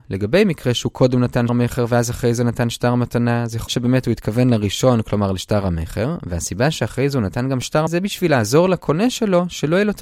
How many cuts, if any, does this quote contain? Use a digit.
3